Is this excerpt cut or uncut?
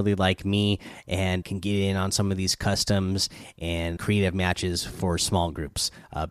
cut